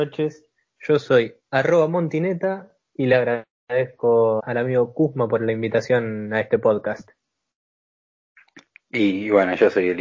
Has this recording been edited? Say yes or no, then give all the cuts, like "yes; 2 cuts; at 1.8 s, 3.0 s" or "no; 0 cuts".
yes; 2 cuts; at 1.4 s, 4.4 s